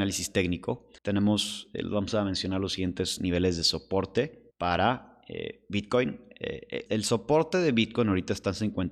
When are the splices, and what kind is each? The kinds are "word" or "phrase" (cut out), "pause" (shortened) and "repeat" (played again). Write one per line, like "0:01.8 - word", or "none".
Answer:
0:01.0 - pause
0:04.5 - pause
0:06.9 - word